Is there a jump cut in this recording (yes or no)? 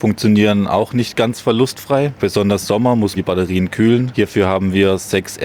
yes